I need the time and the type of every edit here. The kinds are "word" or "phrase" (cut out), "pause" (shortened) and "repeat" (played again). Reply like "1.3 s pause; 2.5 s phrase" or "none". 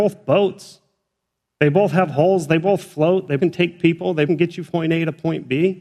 3.4 s word; 4.3 s word; 4.7 s word